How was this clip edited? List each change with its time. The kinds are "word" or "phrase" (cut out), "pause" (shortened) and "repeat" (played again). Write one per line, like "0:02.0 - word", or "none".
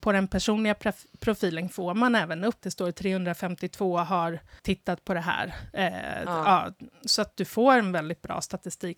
0:02.6 - phrase
0:04.6 - pause

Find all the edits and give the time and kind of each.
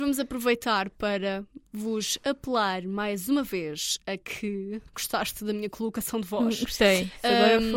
0:04.9 - pause

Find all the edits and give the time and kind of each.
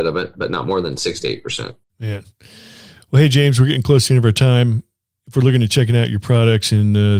none

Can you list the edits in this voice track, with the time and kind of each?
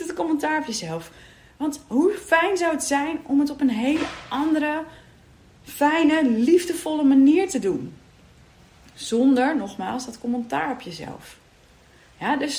none

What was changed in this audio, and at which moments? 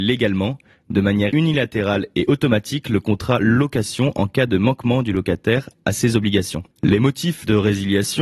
0:06.7 - pause

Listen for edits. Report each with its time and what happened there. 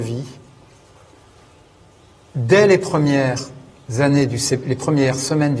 none

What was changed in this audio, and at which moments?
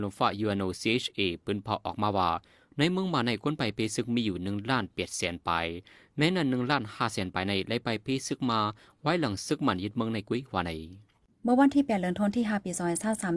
none

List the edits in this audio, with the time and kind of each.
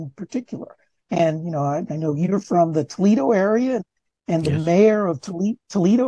none

